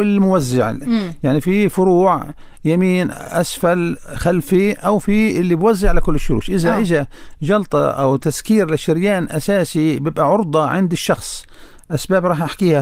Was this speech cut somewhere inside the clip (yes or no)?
no